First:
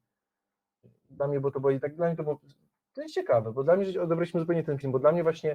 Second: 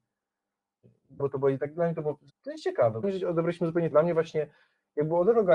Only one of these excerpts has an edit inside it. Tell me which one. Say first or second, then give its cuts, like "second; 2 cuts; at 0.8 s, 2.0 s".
second; 4 cuts; at 1.2 s, 2.3 s, 3.0 s, 3.9 s